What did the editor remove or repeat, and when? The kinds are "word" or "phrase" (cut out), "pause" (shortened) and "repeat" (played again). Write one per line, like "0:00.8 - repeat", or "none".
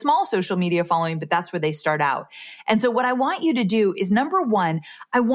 none